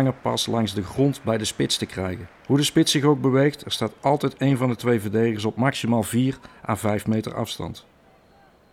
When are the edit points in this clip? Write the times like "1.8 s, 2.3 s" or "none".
2.4 s